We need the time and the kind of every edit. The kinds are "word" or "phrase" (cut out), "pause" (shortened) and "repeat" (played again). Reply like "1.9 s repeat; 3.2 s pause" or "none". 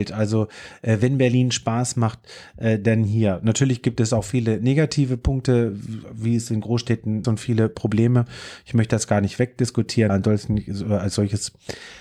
7.2 s phrase; 10.1 s word

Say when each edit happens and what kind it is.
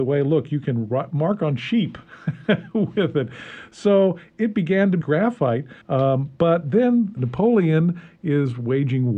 5.0 s phrase; 5.8 s pause; 7.2 s word

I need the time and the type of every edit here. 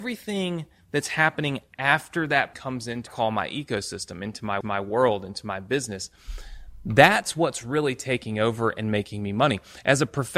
2.5 s word; 3.1 s phrase; 4.6 s repeat

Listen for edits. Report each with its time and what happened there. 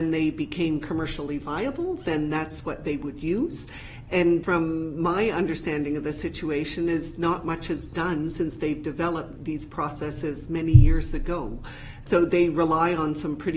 none

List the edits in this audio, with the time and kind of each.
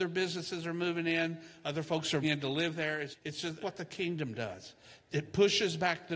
2.2 s word; 3.1 s word; 3.6 s word

